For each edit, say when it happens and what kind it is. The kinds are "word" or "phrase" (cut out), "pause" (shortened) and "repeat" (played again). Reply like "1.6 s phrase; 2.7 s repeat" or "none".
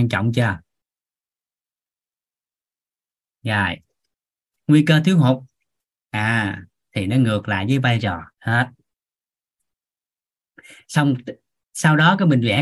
8.3 s pause